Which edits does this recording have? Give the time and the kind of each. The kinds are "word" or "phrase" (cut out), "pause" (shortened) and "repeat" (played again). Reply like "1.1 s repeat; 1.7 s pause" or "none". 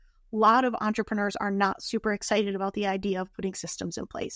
none